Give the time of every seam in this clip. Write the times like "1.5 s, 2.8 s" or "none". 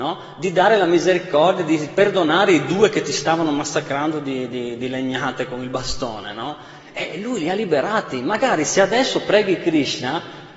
none

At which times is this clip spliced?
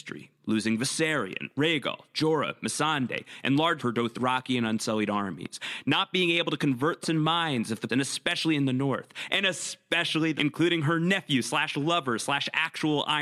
3.8 s, 7.0 s, 7.9 s, 10.4 s

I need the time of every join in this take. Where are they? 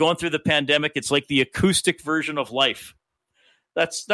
none

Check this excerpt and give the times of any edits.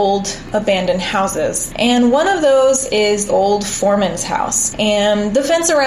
3.3 s

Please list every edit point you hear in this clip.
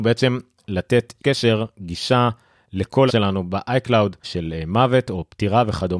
1.2 s, 3.1 s, 4.2 s

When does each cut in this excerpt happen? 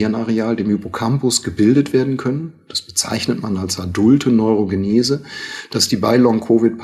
none

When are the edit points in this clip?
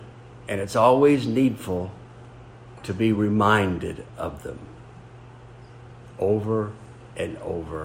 none

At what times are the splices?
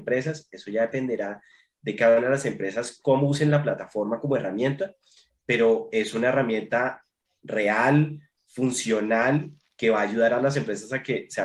7.3 s

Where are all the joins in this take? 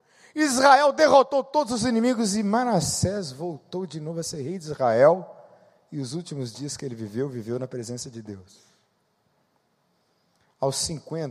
none

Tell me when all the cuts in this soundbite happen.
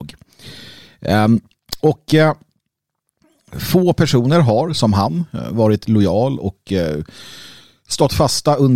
none

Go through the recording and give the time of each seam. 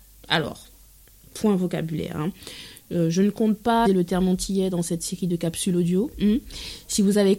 3.9 s

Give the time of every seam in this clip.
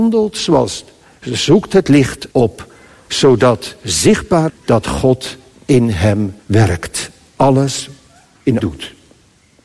2.3 s, 4.5 s, 6.4 s, 8.6 s

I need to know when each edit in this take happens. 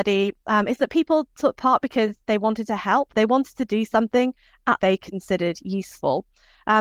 4.8 s

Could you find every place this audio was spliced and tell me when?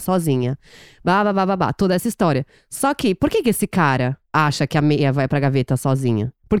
none

